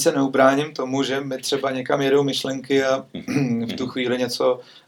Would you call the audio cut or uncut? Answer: uncut